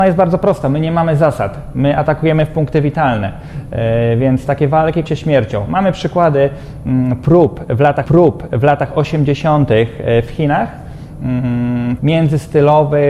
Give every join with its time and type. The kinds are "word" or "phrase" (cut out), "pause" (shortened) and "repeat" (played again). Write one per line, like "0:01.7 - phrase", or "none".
0:05.1 - word
0:08.0 - repeat
0:12.0 - word